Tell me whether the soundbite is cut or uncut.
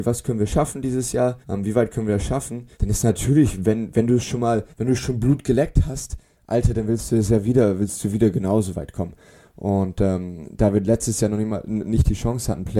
cut